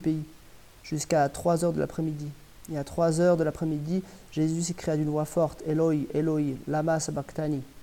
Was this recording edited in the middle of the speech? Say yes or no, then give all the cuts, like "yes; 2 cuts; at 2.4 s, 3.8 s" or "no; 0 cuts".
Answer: no; 0 cuts